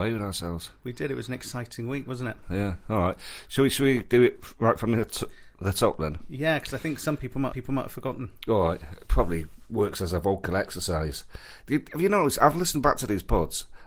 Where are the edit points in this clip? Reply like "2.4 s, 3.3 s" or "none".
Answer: 7.5 s

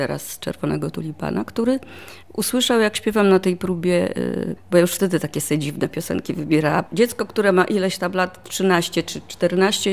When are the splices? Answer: 2.2 s, 4.6 s, 6.9 s

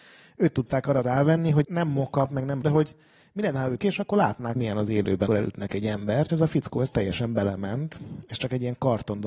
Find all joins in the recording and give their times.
1.6 s, 2.6 s, 3.8 s, 4.6 s, 5.3 s, 6.3 s

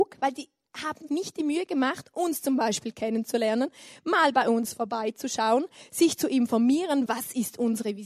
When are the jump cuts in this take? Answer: 1.1 s, 7.1 s

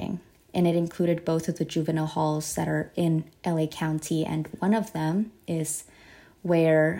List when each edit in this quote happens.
none

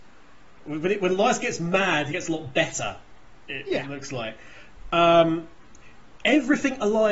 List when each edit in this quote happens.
2.1 s

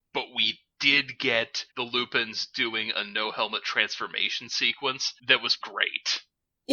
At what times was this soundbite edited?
1.7 s, 5.2 s, 5.6 s

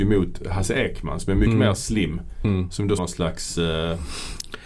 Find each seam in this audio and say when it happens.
3.0 s

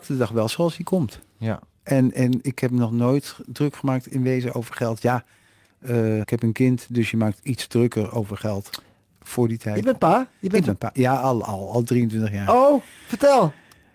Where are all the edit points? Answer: 6.2 s

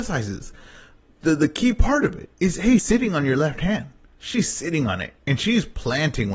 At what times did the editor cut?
2.3 s, 2.8 s

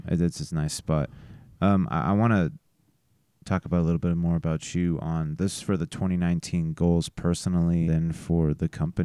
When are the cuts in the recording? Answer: 7.9 s

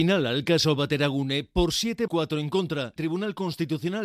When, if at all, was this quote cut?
2.1 s, 3.0 s

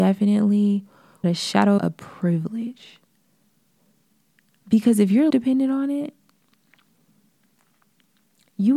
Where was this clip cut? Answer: 1.2 s, 1.8 s, 5.3 s

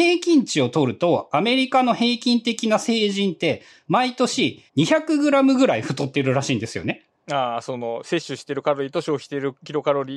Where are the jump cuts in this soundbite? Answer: 4.7 s

